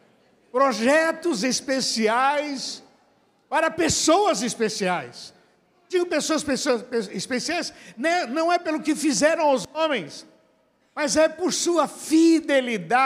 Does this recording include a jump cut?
no; 0 cuts

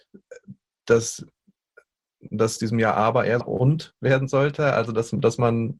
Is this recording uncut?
no; 2 cuts; at 2.6 s, 3.4 s

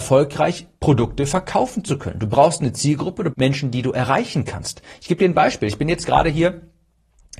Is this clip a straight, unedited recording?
no; 1 cut; at 3.3 s

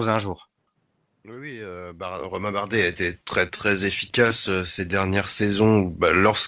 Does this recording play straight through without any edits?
no; 1 cut; at 3.2 s

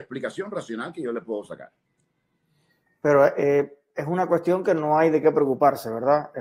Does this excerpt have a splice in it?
no; 0 cuts

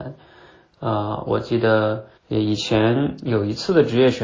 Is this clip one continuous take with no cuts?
no; 1 cut; at 2.2 s

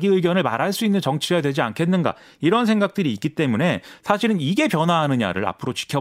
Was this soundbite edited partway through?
no; 0 cuts

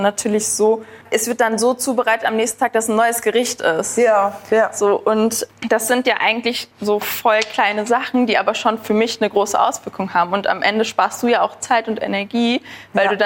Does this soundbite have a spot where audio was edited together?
yes; 2 cuts; at 1.0 s, 6.7 s

